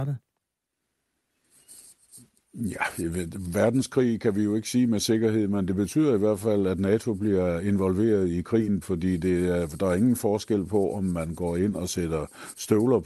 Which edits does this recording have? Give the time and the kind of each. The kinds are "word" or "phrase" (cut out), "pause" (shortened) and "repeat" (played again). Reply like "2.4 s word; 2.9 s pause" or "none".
8.8 s word